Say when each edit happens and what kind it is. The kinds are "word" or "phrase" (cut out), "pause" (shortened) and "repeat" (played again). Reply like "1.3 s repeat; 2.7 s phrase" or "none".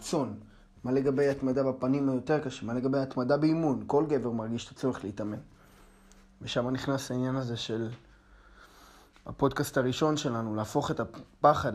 none